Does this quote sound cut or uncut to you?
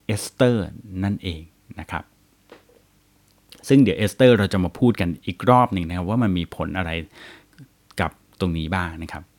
uncut